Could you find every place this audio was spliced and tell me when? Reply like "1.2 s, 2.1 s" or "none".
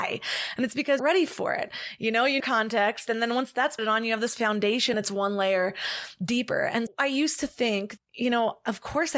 1.0 s, 2.4 s, 3.8 s, 4.9 s, 6.9 s, 8.0 s